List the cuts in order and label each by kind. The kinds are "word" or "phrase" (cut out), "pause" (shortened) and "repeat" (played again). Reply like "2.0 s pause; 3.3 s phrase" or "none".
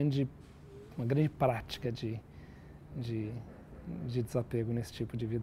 none